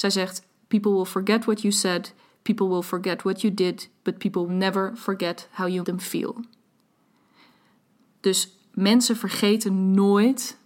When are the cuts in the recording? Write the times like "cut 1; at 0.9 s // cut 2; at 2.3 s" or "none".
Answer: cut 1; at 4.5 s // cut 2; at 5.8 s